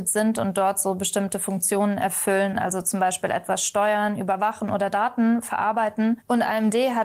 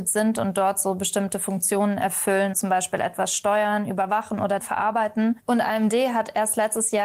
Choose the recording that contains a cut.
second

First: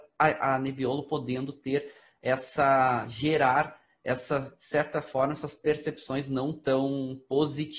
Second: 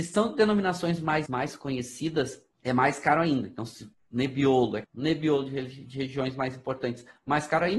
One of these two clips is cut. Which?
second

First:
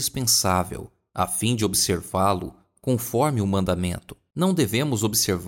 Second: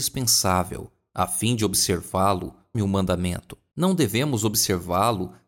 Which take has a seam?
second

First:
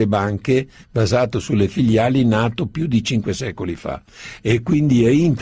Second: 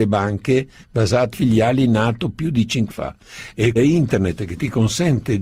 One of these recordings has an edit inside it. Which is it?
second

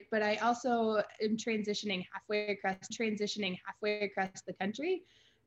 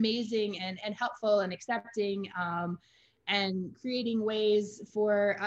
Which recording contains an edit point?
first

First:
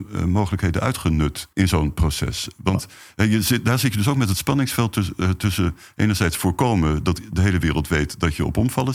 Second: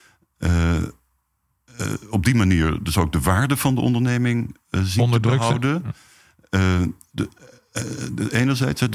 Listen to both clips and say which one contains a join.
first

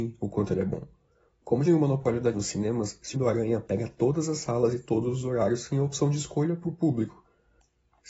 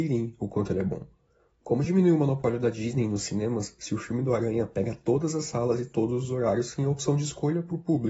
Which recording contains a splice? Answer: first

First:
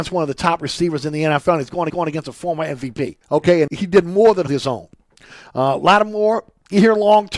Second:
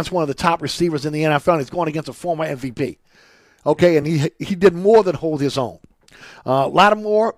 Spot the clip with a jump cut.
first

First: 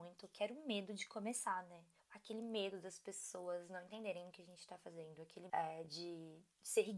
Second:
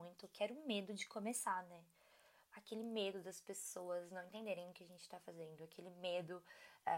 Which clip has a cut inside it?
first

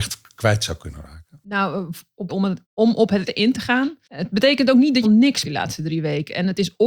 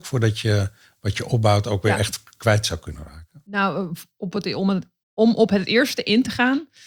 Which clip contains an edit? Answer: first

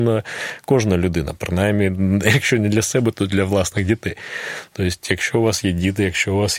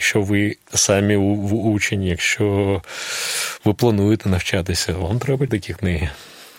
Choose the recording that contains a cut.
second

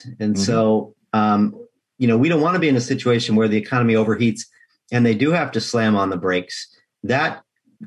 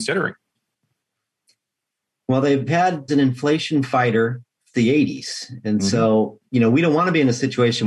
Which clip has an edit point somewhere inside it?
second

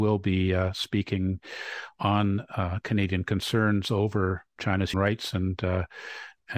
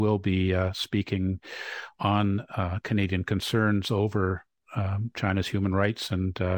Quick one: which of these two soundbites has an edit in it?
first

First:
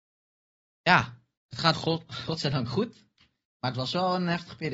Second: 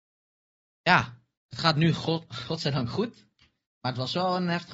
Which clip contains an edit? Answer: first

